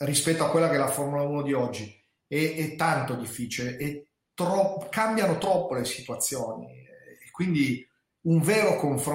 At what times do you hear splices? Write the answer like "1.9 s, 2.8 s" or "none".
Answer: none